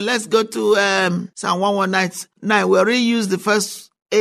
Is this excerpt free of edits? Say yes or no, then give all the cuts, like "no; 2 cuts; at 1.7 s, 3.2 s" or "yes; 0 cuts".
yes; 0 cuts